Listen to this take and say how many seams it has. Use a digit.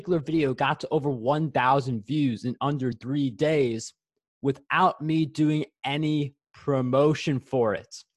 0